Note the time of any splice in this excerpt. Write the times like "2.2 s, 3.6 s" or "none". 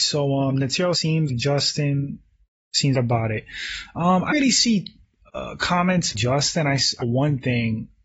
0.9 s, 1.3 s, 2.9 s, 4.3 s, 6.1 s, 7.0 s